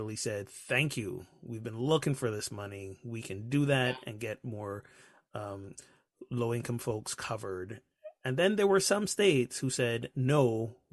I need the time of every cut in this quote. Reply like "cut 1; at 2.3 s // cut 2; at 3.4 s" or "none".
none